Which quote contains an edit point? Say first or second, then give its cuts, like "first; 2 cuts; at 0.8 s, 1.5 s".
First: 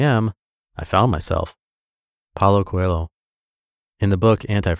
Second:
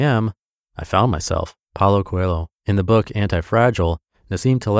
second; 2 cuts; at 1.6 s, 2.6 s